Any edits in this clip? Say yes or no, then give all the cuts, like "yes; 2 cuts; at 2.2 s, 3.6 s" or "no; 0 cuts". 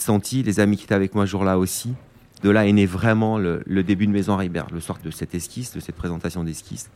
no; 0 cuts